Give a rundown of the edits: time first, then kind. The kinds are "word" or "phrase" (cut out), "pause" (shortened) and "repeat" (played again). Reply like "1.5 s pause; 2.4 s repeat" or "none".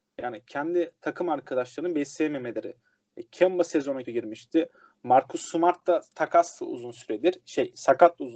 4.0 s word